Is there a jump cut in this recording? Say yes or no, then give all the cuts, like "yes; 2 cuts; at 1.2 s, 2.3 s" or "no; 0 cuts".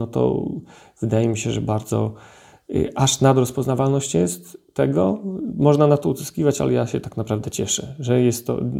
no; 0 cuts